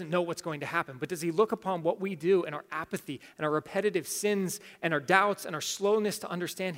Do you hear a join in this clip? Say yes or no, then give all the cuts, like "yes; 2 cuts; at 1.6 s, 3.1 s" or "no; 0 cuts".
no; 0 cuts